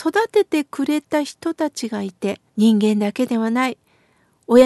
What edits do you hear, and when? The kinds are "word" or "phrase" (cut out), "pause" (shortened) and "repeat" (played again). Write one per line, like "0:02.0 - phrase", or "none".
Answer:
0:02.5 - pause

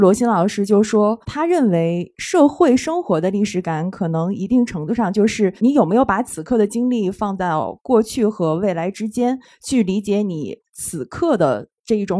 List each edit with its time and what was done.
0:01.2 - pause
0:05.6 - pause

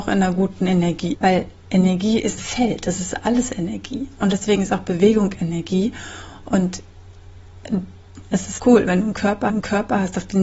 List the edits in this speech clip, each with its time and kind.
0:01.1 - word
0:02.4 - phrase
0:08.6 - word
0:09.5 - repeat

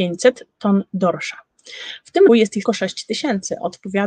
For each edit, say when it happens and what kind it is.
0:02.3 - word
0:02.6 - word

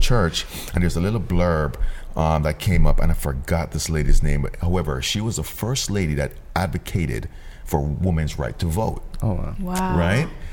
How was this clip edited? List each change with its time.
none

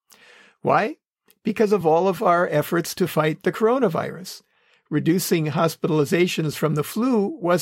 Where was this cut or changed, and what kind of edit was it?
none

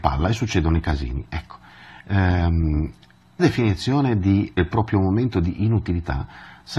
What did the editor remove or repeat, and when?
0:03.4 - word
0:04.6 - word

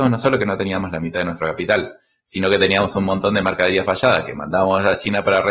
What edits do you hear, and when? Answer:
none

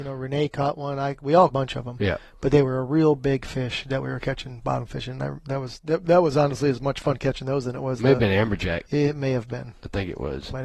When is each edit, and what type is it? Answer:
0:01.5 - phrase
0:08.9 - pause

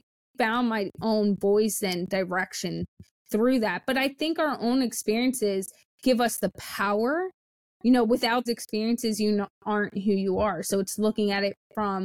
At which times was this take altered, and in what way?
0:08.5 - word

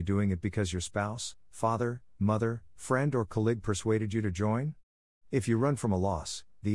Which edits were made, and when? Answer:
none

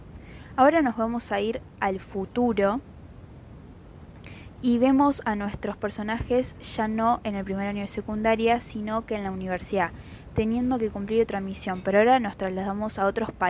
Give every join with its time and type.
none

